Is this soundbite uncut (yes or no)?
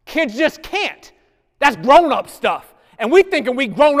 yes